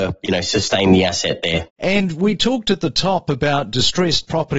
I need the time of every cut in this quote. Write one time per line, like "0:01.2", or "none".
0:01.7

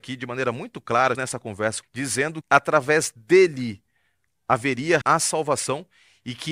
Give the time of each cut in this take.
0:01.1
0:01.8
0:02.4
0:05.0

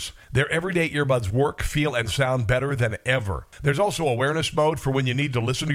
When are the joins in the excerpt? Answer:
none

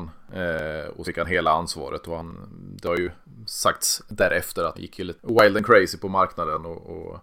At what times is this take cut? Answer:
0:01.0
0:04.7

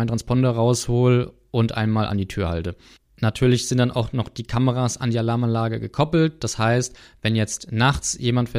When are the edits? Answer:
none

